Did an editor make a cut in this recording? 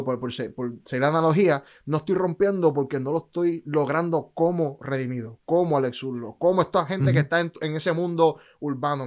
no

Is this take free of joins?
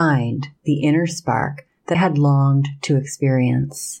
no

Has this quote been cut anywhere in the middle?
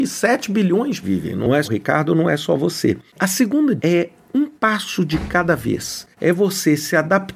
yes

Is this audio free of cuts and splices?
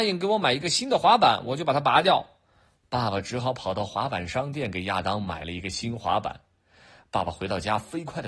yes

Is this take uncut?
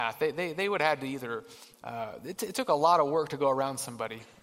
yes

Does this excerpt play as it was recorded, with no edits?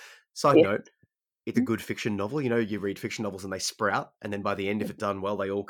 no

